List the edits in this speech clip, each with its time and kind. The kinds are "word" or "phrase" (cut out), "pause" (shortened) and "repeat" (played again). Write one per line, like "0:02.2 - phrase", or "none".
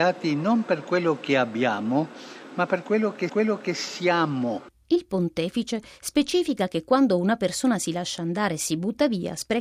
0:03.3 - repeat